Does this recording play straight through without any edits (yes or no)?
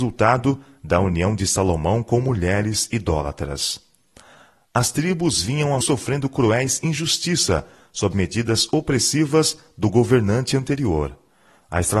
no